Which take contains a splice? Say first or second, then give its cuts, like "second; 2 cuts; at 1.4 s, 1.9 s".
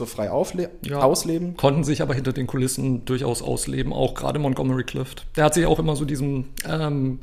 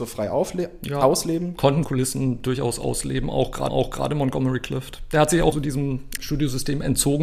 second; 4 cuts; at 1.8 s, 3.7 s, 5.5 s, 6.2 s